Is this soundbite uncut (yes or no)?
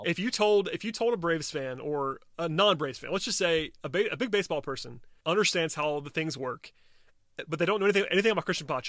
no